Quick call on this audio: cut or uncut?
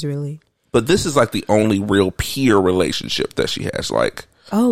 uncut